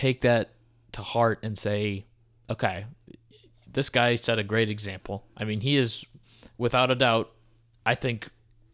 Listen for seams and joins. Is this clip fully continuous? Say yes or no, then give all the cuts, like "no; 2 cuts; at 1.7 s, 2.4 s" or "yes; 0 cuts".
yes; 0 cuts